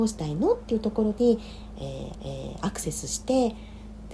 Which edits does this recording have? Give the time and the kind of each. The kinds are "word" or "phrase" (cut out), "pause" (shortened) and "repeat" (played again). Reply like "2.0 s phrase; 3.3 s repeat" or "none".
2.1 s repeat